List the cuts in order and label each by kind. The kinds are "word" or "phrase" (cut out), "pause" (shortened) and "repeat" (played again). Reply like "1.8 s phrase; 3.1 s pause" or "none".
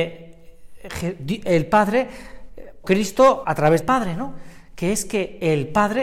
2.8 s word; 3.4 s word; 3.8 s word